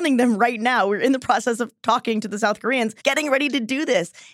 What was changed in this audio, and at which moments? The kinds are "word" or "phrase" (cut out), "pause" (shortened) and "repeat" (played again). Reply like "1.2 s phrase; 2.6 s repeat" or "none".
3.0 s pause